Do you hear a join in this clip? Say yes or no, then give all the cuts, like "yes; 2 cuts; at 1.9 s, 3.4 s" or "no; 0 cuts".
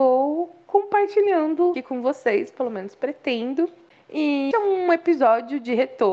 yes; 2 cuts; at 1.7 s, 4.5 s